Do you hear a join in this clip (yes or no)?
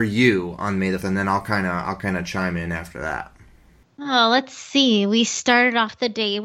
yes